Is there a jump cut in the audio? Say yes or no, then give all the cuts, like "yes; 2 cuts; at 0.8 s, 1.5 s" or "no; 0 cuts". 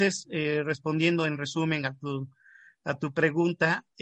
no; 0 cuts